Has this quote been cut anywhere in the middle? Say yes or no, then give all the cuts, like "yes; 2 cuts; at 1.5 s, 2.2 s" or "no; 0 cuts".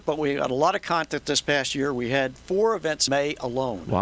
yes; 1 cut; at 3.1 s